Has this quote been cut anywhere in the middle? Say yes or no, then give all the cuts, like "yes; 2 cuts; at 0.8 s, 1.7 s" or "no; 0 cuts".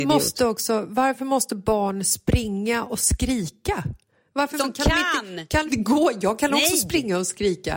yes; 2 cuts; at 4.6 s, 5.7 s